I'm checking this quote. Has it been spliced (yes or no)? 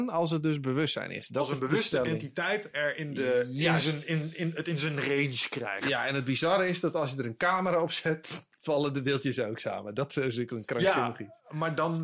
no